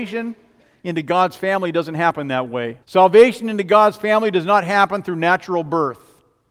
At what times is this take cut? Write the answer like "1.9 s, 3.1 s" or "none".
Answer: 2.8 s

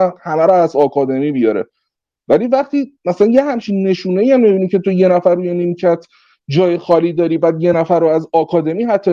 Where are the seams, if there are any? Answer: none

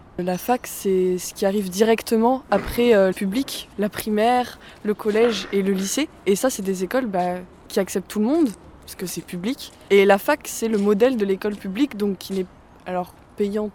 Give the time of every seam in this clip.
3.1 s

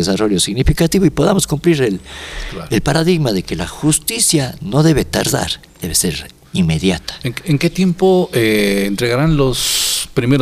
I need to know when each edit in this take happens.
5.7 s

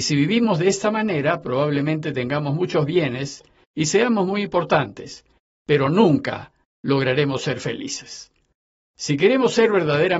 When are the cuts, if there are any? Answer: none

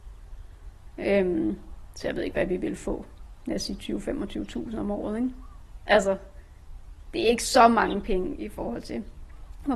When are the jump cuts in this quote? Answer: none

